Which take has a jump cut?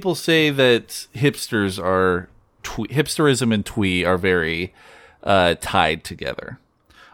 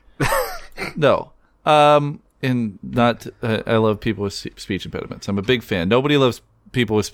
second; 1 cut; at 2.3 s

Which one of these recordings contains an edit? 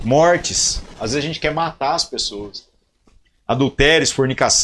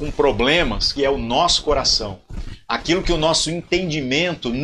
second; 1 cut; at 1.0 s

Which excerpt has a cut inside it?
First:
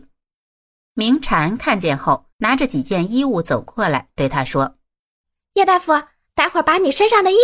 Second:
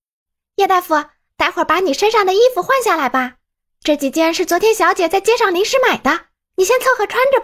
first; 1 cut; at 2.3 s

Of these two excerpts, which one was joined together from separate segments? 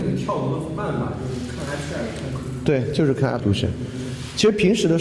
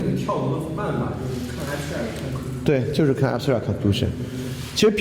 first; 1 cut; at 3.4 s

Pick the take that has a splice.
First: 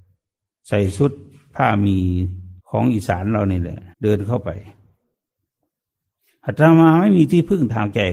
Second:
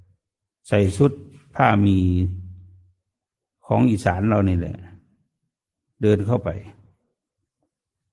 first; 2 cuts; at 2.6 s, 3.9 s

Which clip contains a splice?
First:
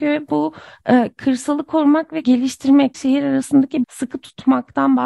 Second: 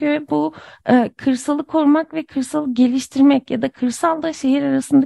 first; 3 cuts; at 2.2 s, 2.9 s, 3.8 s

